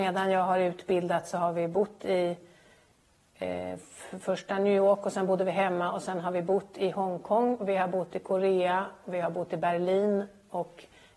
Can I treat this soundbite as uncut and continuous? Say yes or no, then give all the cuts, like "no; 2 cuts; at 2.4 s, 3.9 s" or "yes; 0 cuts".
yes; 0 cuts